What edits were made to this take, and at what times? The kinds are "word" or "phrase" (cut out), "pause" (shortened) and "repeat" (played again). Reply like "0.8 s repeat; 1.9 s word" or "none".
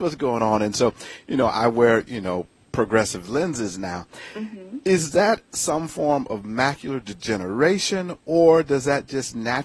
none